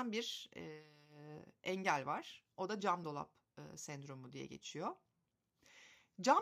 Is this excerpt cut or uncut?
uncut